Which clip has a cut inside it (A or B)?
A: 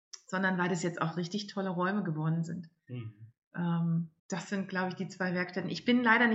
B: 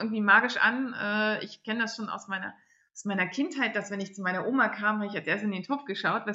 A